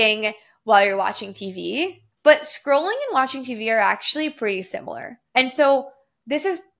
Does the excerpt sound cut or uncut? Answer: cut